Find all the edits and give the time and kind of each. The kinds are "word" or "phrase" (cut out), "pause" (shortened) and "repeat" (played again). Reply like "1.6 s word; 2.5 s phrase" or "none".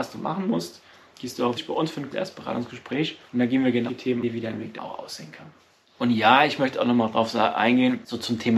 1.6 s phrase; 2.1 s word; 3.3 s pause; 3.9 s word; 4.2 s phrase; 4.8 s word